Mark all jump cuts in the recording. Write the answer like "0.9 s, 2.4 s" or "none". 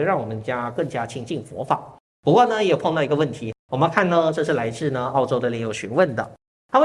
2.1 s, 3.6 s